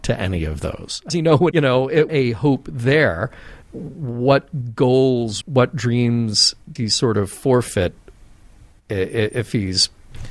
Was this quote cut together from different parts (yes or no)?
yes